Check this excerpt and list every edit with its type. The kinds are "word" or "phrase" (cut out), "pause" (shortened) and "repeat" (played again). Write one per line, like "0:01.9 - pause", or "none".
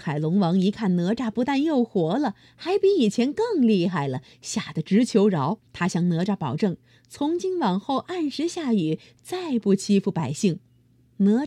0:05.7 - pause